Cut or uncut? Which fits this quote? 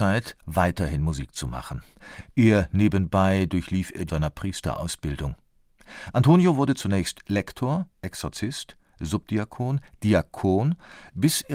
cut